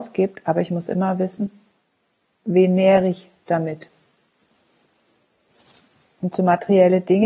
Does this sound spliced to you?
no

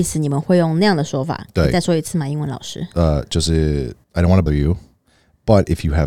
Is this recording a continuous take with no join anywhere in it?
no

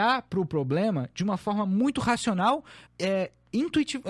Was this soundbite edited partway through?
yes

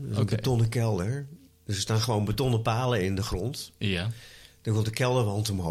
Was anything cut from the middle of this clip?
no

